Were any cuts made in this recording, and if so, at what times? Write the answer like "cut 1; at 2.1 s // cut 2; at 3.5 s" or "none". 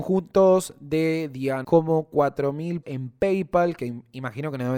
cut 1; at 1.6 s // cut 2; at 2.8 s